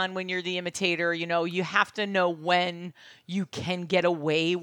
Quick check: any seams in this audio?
no; 0 cuts

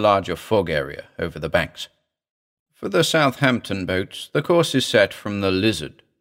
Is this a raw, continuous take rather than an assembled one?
yes; 0 cuts

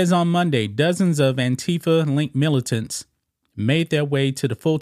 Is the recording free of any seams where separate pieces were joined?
yes; 0 cuts

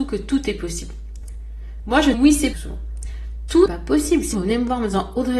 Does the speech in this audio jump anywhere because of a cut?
yes; 4 cuts; at 2.1 s, 2.5 s, 3.7 s, 4.3 s

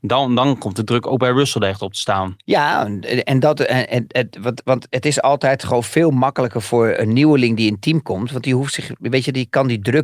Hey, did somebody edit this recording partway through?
no; 0 cuts

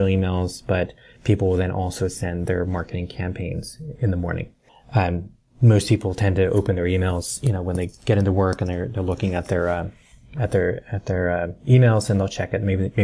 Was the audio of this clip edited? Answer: no; 0 cuts

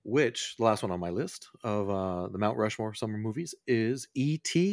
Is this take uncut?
yes; 0 cuts

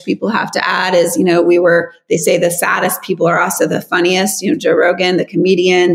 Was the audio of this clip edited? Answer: no; 0 cuts

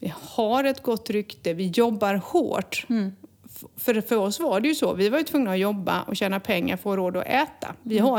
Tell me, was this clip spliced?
no; 0 cuts

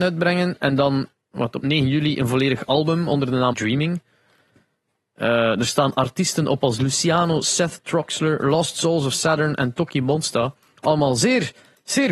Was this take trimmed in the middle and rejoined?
yes; 1 cut; at 3.5 s

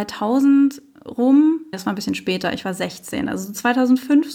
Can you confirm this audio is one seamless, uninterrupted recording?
no; 1 cut; at 1.7 s

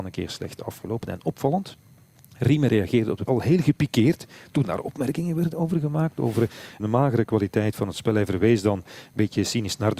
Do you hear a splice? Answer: yes; 2 cuts; at 3.3 s, 6.8 s

